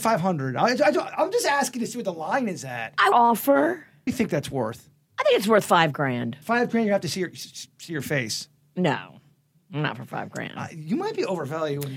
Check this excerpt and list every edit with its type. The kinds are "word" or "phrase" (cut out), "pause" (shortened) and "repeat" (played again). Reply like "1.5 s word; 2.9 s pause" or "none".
3.1 s phrase; 4.1 s phrase; 6.4 s word